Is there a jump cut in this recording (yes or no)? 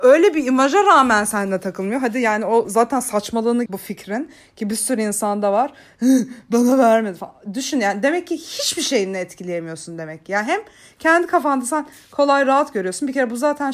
yes